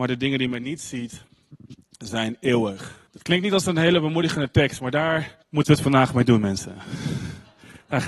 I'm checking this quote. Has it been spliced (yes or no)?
yes